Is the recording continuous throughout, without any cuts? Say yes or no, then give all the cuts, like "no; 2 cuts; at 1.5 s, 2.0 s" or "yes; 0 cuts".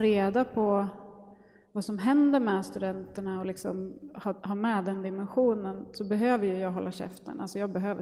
yes; 0 cuts